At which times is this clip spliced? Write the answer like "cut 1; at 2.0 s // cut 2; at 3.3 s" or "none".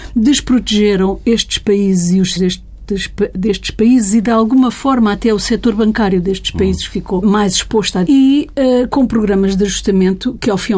cut 1; at 2.4 s // cut 2; at 7.2 s // cut 3; at 8.1 s